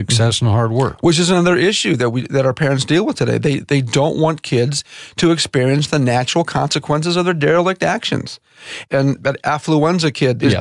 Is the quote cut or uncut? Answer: uncut